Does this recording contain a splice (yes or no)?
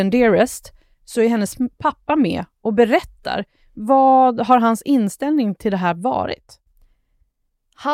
no